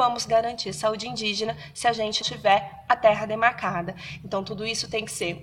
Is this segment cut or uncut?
cut